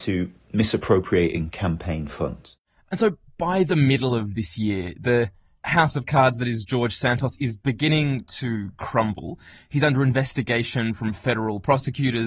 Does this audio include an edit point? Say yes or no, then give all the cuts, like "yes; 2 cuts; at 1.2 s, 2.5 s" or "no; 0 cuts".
no; 0 cuts